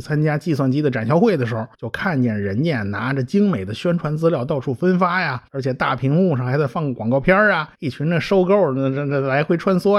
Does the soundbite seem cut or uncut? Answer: cut